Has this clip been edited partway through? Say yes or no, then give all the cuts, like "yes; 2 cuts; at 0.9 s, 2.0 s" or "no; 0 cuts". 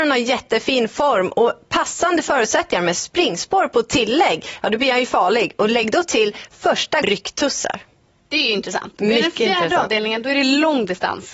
yes; 1 cut; at 7.0 s